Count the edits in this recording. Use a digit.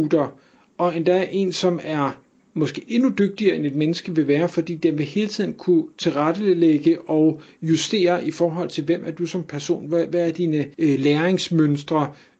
1